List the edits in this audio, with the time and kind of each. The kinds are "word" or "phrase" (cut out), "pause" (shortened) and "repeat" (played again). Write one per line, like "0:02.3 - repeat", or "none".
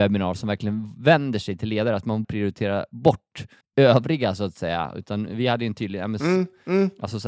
0:02.2 - word
0:03.6 - pause